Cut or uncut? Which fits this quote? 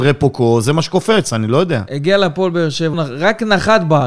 cut